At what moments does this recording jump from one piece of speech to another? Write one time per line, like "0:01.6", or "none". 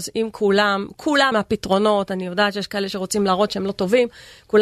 0:01.3